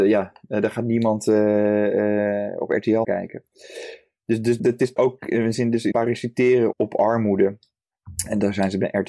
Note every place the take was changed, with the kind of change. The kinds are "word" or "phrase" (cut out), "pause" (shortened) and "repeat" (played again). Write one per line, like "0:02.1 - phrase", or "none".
0:03.0 - word
0:04.6 - word
0:05.0 - word
0:05.5 - word
0:05.9 - word
0:06.7 - word